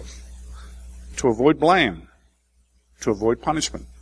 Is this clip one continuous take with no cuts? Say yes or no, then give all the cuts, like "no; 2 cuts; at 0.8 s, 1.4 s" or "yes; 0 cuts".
yes; 0 cuts